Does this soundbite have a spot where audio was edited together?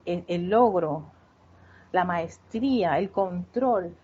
no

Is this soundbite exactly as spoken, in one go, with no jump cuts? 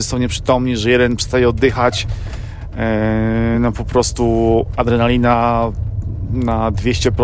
yes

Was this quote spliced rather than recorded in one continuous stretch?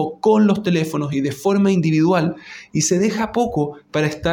no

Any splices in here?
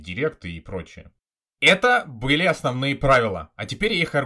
no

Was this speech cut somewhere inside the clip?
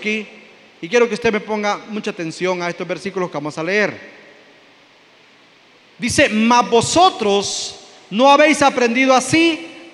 no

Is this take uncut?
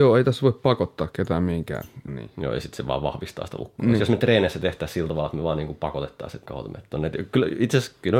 no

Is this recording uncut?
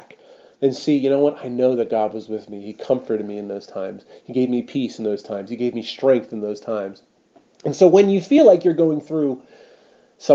yes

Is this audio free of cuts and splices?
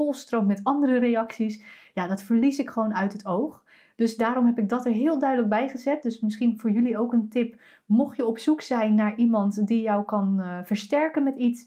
yes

